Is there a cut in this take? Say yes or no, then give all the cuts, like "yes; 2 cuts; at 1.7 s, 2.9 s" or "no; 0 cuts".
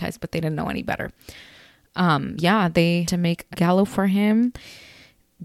yes; 3 cuts; at 2.4 s, 3.0 s, 3.5 s